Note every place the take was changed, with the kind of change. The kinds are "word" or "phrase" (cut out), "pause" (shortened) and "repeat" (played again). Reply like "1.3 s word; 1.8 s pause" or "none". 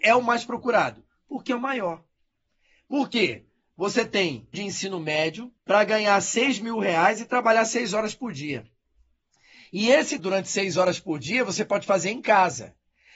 4.5 s word; 5.6 s pause; 10.2 s word